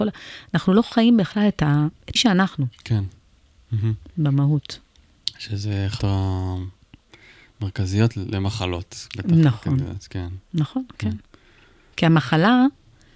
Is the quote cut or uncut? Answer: cut